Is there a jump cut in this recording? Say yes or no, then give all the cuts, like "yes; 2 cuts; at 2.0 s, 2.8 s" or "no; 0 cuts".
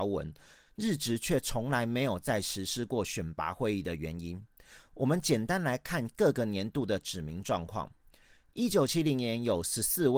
no; 0 cuts